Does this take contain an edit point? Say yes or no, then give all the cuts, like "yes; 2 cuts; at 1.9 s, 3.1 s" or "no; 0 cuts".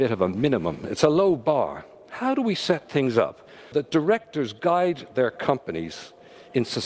yes; 1 cut; at 3.7 s